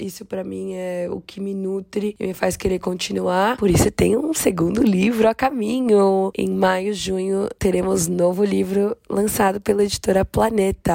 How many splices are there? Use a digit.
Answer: 0